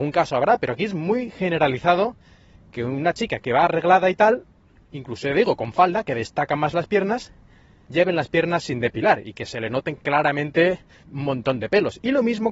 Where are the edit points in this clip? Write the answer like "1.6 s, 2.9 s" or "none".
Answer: none